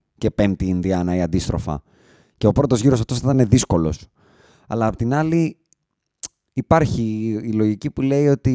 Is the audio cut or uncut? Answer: uncut